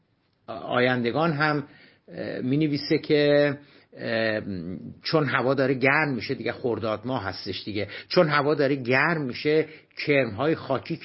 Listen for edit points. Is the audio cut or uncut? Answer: uncut